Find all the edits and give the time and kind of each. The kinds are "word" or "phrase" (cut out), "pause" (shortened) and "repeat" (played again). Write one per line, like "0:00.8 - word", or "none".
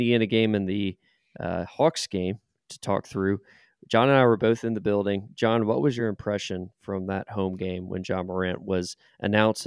none